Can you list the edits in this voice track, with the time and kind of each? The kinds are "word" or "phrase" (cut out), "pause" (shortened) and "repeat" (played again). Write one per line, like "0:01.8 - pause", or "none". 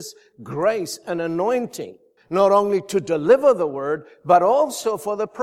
0:02.2 - pause